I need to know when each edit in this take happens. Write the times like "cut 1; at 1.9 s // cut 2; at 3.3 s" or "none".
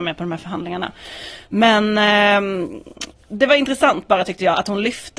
none